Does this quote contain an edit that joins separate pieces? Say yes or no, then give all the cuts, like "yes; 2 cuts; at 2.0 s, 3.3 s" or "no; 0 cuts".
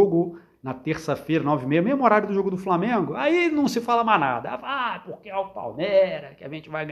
no; 0 cuts